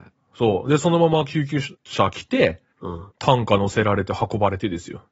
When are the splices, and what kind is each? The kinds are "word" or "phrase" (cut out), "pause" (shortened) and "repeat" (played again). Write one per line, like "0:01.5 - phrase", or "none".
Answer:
0:01.7 - pause
0:02.7 - pause
0:03.1 - pause